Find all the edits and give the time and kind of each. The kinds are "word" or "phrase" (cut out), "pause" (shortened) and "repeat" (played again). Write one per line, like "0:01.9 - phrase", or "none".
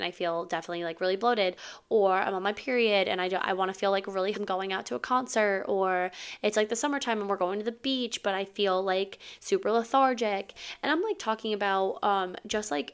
0:04.3 - phrase